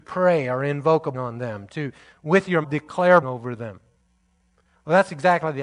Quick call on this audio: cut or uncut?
cut